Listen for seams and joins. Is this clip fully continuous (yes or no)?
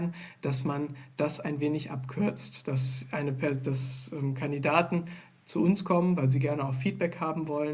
yes